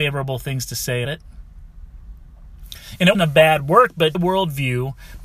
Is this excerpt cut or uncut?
cut